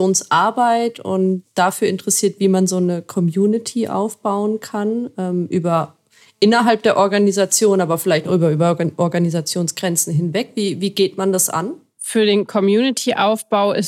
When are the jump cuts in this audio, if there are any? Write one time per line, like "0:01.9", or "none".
none